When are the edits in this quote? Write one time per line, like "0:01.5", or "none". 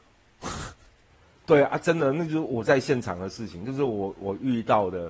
none